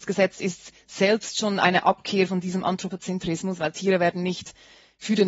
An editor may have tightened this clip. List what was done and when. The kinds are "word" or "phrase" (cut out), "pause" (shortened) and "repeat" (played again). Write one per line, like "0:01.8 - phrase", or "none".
none